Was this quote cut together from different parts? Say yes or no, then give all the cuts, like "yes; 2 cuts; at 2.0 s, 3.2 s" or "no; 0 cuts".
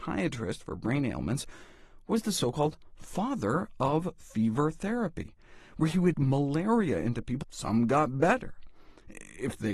yes; 2 cuts; at 6.1 s, 7.4 s